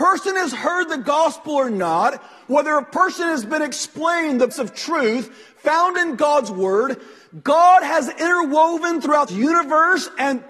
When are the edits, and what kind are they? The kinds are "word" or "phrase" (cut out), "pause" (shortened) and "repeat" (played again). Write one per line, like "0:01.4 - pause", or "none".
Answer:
0:04.5 - word
0:09.3 - word